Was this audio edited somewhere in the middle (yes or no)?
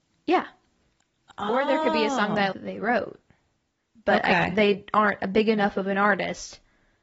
yes